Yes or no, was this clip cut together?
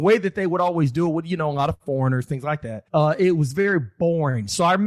yes